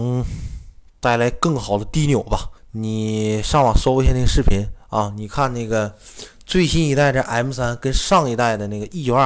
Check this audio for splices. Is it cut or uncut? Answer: cut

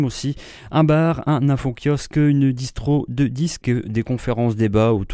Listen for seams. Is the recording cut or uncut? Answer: cut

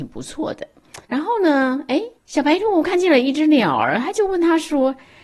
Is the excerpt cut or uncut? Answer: cut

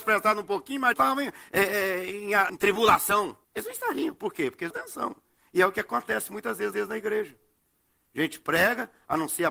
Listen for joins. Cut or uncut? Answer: cut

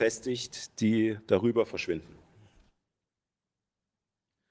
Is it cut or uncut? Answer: uncut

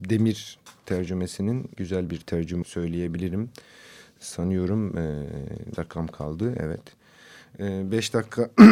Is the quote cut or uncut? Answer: cut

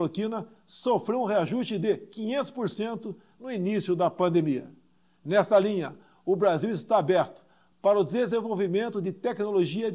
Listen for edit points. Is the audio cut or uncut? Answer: uncut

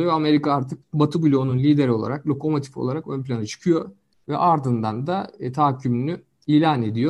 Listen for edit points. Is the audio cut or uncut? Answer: uncut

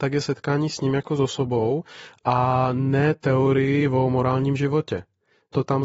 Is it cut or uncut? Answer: uncut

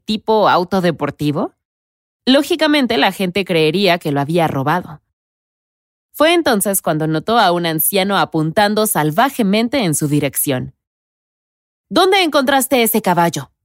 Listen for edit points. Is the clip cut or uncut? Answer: uncut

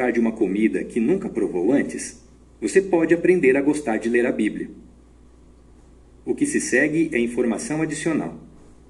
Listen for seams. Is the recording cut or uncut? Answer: uncut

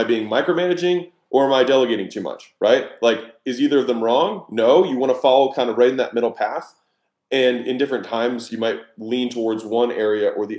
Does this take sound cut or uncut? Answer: uncut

